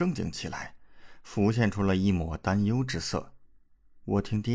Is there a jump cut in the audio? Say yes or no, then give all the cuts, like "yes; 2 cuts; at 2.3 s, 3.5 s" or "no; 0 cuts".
no; 0 cuts